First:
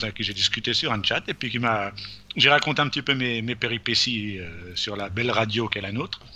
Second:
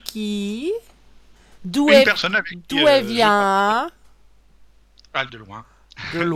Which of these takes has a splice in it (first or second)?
second